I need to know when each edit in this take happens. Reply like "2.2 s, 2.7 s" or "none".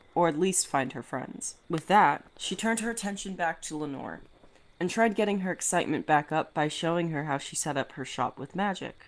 1.6 s, 2.3 s

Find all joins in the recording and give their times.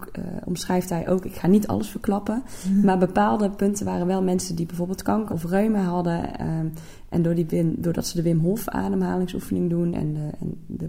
5.3 s

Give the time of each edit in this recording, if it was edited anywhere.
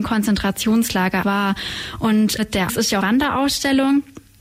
1.2 s, 2.4 s, 2.7 s, 3.0 s

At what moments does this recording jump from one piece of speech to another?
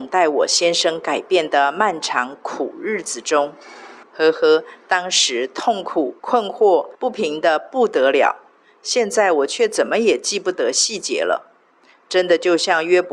4.0 s, 6.2 s, 6.9 s

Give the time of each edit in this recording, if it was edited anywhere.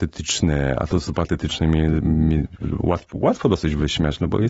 none

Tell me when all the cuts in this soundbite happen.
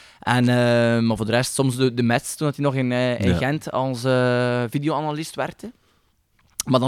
none

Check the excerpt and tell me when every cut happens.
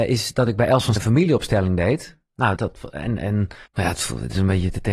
1.0 s, 2.6 s, 3.7 s

